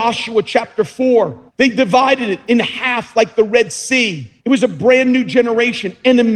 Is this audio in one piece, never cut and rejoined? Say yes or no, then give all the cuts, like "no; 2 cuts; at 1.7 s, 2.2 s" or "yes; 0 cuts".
no; 2 cuts; at 1.5 s, 4.4 s